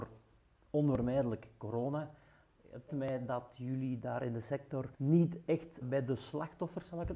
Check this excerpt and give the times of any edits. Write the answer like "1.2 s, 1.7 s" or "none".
2.9 s, 4.9 s, 5.8 s